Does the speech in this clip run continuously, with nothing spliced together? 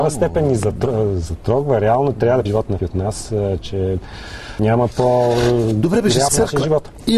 no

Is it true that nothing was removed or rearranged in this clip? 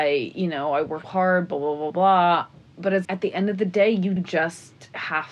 no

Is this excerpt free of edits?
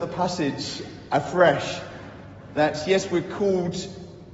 yes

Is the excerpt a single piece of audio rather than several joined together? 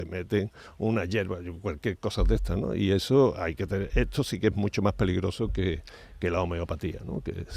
yes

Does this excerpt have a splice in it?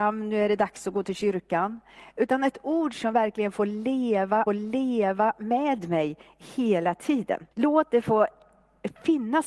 yes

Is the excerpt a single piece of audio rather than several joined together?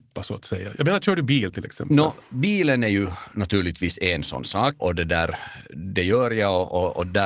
no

